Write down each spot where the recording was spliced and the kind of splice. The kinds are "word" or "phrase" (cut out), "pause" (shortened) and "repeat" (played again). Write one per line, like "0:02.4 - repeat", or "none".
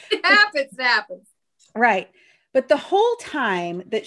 none